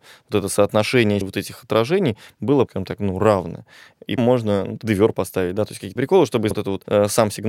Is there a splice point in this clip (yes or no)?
yes